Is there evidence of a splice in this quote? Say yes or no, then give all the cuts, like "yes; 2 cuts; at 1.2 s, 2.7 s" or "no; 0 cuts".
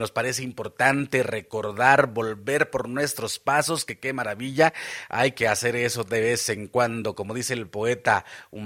no; 0 cuts